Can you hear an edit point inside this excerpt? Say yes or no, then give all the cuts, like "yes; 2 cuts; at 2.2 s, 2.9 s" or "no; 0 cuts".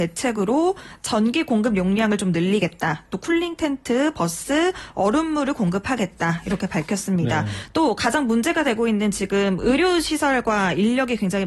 no; 0 cuts